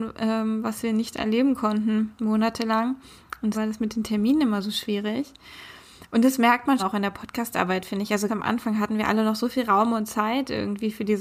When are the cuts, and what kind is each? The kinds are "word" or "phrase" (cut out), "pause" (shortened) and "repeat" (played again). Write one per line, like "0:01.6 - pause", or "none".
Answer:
0:03.5 - word
0:06.8 - word
0:08.3 - word